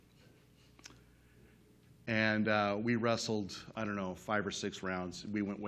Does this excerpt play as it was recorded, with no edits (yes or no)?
yes